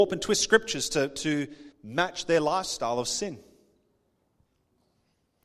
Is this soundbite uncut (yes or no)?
no